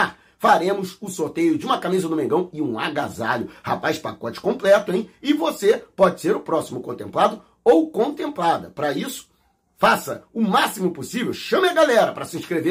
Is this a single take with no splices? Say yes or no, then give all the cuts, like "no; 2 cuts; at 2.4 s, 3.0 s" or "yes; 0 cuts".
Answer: yes; 0 cuts